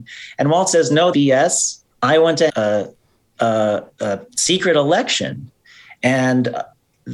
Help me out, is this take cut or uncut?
cut